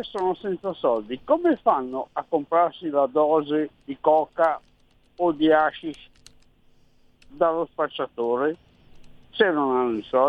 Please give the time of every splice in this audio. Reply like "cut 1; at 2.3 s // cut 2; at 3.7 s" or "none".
none